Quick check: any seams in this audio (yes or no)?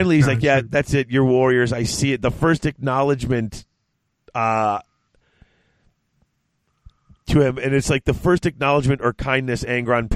no